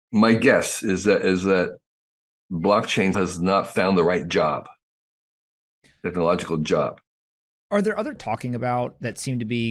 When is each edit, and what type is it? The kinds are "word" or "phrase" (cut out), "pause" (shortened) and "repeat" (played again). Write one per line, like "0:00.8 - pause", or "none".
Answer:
0:03.1 - word
0:08.2 - phrase